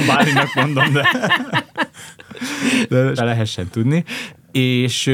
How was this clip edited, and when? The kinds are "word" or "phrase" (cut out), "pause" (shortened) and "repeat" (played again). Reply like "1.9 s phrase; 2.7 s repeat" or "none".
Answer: 3.2 s word

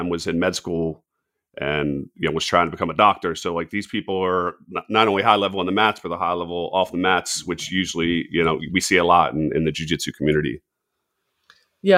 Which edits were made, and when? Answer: none

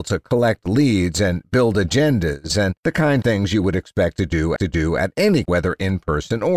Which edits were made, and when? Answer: 2.8 s pause; 3.2 s word; 4.6 s repeat; 5.4 s word

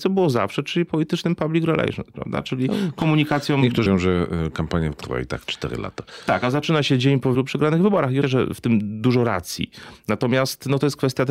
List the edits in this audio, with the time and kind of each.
3.9 s word; 4.9 s word; 7.3 s word; 8.2 s word

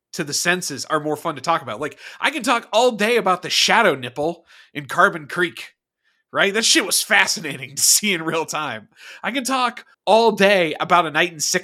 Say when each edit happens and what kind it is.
9.9 s pause

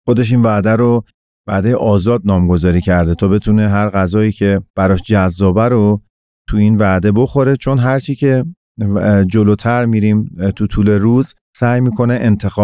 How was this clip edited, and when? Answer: 4.7 s pause

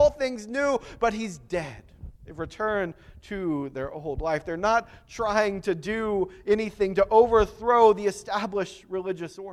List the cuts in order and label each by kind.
2.2 s pause

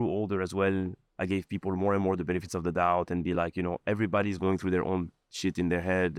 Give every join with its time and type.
none

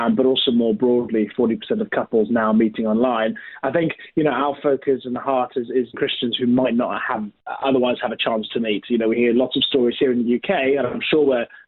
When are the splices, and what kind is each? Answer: 5.9 s phrase

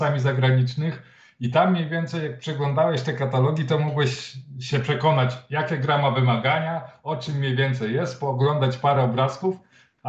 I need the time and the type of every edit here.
none

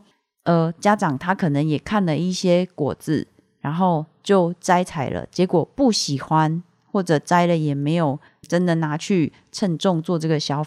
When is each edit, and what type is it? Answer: 8.4 s word

